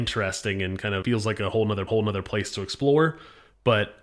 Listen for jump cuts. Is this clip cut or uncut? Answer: cut